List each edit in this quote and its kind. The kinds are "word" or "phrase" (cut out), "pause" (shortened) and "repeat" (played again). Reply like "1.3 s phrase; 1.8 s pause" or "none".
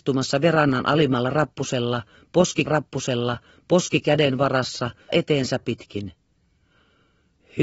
2.7 s repeat; 5.1 s word; 5.6 s word